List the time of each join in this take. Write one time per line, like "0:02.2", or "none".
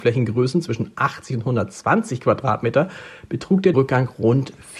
0:03.7